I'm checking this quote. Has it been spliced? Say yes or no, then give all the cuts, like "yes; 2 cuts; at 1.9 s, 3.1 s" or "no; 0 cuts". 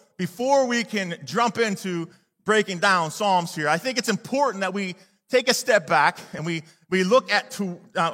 no; 0 cuts